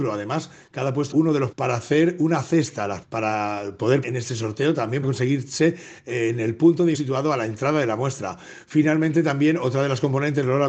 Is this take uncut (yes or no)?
no